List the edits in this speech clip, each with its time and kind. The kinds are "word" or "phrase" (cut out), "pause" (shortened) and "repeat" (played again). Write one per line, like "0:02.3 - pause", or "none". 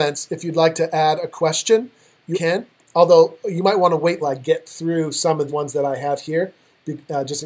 0:02.3 - word
0:04.2 - word
0:05.5 - word